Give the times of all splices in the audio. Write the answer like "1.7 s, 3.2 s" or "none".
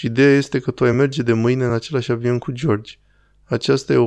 none